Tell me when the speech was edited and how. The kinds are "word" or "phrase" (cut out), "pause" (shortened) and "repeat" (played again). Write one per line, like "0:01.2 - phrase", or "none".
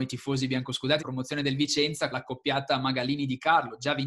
0:01.0 - word
0:02.1 - word